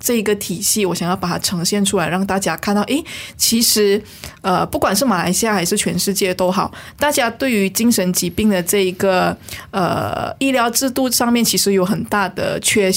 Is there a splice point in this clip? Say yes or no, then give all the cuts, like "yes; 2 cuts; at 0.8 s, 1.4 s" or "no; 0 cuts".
no; 0 cuts